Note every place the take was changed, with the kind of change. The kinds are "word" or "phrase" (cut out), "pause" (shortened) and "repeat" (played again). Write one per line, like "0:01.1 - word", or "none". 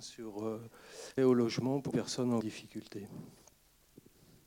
0:01.2 - word
0:01.9 - word
0:02.4 - word